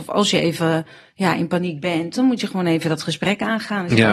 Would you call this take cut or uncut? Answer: uncut